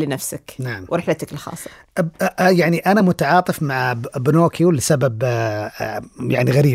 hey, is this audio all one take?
yes; 0 cuts

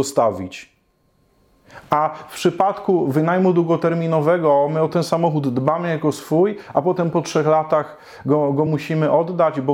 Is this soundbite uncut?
yes; 0 cuts

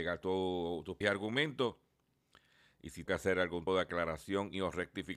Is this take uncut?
no; 3 cuts; at 1.0 s, 3.1 s, 3.7 s

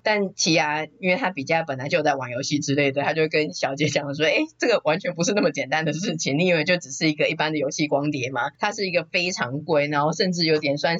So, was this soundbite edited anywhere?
no; 0 cuts

